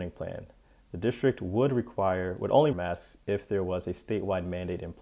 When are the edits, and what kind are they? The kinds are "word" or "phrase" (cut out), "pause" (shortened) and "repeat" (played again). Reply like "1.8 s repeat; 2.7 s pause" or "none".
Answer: 2.7 s phrase